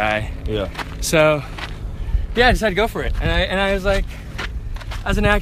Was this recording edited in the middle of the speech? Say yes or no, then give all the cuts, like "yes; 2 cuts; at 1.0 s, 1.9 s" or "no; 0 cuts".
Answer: no; 0 cuts